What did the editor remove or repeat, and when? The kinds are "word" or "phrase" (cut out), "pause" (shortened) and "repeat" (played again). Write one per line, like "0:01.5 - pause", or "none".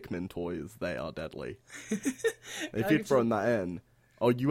none